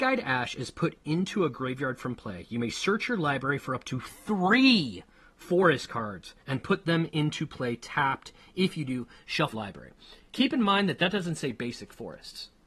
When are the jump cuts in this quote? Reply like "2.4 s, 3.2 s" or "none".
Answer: 6.4 s, 9.5 s